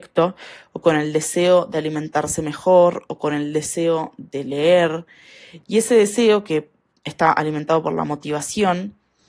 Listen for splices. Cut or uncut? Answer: uncut